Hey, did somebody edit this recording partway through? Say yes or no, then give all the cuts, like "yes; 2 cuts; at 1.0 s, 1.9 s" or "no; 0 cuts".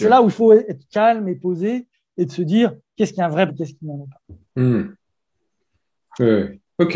yes; 1 cut; at 3.5 s